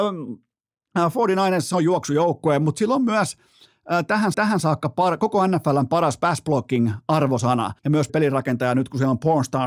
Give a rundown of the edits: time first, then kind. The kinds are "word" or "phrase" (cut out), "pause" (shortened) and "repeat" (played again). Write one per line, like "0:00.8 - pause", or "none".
0:04.3 - repeat
0:07.8 - pause
0:08.1 - word